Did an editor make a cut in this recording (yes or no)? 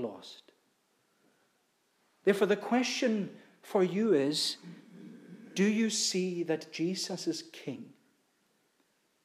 no